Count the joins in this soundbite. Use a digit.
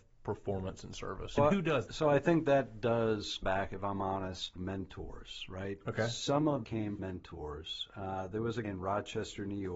7